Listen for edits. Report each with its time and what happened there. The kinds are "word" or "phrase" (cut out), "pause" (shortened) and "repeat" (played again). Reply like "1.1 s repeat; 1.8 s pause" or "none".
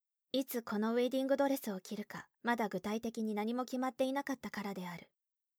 2.3 s pause

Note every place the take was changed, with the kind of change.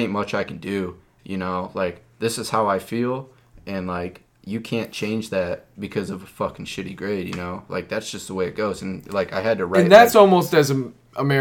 none

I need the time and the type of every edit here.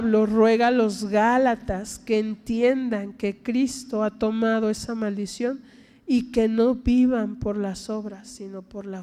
none

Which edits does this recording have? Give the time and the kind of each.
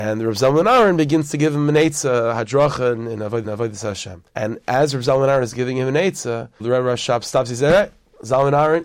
3.4 s repeat; 4.3 s pause; 6.6 s word

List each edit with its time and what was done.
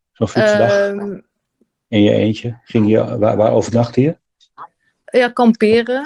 none

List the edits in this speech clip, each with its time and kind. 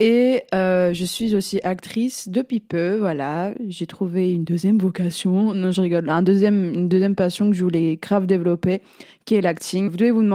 none

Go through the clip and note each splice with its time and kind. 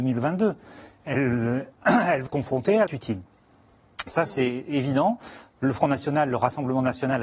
2.3 s word; 2.9 s phrase

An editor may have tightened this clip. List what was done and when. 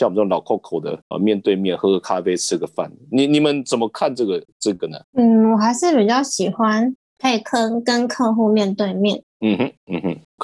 1.1 s word; 5.1 s pause; 9.3 s pause

